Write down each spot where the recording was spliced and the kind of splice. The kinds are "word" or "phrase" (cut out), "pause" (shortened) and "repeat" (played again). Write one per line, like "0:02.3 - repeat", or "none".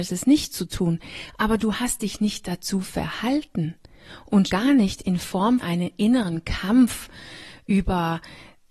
0:04.5 - word
0:05.6 - word